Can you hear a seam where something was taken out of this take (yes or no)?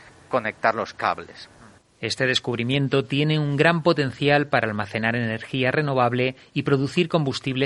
no